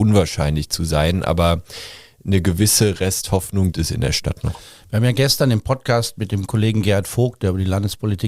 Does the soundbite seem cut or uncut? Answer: cut